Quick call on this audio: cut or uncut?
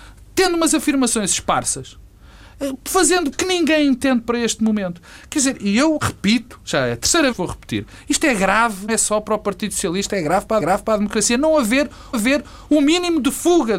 cut